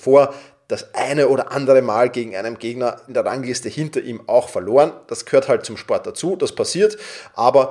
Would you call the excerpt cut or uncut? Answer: uncut